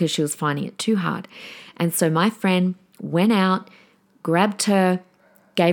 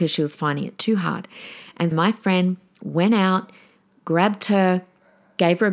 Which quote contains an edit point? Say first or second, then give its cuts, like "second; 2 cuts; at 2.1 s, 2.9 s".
second; 1 cut; at 1.9 s